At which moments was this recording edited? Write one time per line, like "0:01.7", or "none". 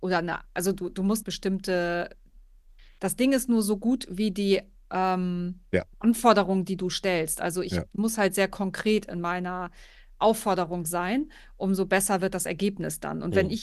0:01.2